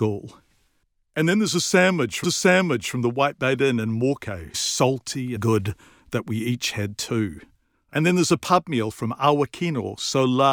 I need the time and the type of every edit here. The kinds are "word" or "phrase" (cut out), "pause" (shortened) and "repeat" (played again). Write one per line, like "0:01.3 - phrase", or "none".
0:02.2 - repeat
0:04.5 - word
0:05.4 - phrase
0:07.7 - pause